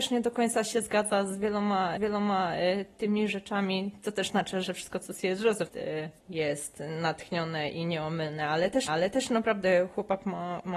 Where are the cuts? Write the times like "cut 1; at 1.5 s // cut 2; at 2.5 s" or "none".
cut 1; at 2.0 s // cut 2; at 4.3 s // cut 3; at 4.6 s // cut 4; at 5.7 s // cut 5; at 6.2 s // cut 6; at 8.9 s